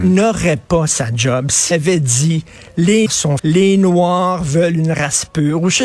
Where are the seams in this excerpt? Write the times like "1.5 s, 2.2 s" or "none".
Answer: 1.7 s, 3.1 s, 3.4 s